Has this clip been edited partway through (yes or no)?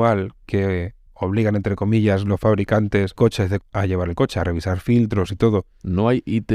yes